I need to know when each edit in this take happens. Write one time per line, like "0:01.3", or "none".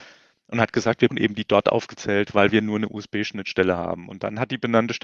0:01.1
0:02.3